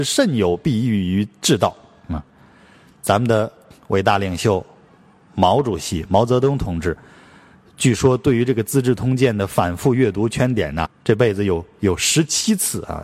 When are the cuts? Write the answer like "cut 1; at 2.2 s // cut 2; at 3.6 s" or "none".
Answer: cut 1; at 10.9 s

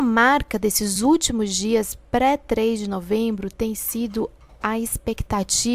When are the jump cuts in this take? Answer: none

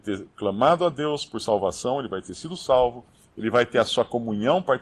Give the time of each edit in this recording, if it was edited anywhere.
none

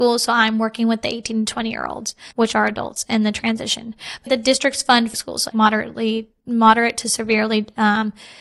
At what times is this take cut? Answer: cut 1; at 2.3 s // cut 2; at 4.3 s // cut 3; at 5.1 s // cut 4; at 5.5 s

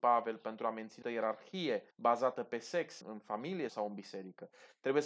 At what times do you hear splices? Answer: cut 1; at 1.0 s // cut 2; at 1.9 s // cut 3; at 3.0 s // cut 4; at 3.7 s

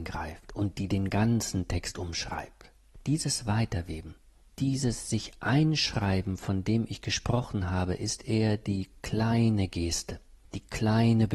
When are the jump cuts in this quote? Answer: none

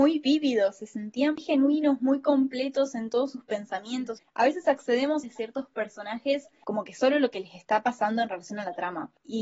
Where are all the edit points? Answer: cut 1; at 1.4 s // cut 2; at 5.2 s

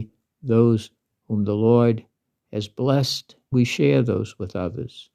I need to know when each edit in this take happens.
cut 1; at 3.5 s

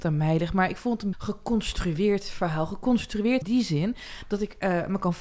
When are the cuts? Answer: cut 1; at 1.1 s // cut 2; at 3.4 s

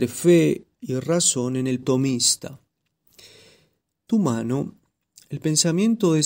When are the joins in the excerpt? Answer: cut 1; at 1.8 s // cut 2; at 4.1 s

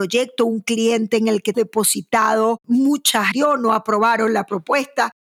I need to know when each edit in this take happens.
cut 1; at 1.5 s // cut 2; at 3.3 s

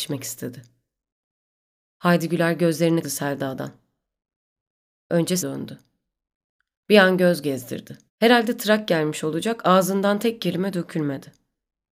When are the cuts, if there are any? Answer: cut 1; at 3.0 s // cut 2; at 5.4 s // cut 3; at 8.1 s

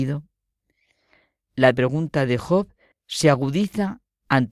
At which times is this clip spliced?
cut 1; at 1.7 s // cut 2; at 2.9 s

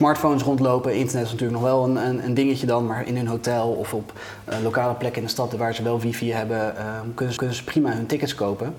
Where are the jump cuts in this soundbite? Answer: cut 1; at 7.4 s

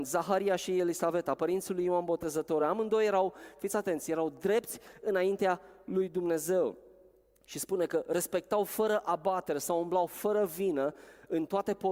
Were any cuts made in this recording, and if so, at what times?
none

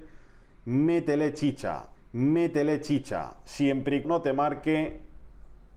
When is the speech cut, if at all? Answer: cut 1; at 1.9 s // cut 2; at 4.0 s

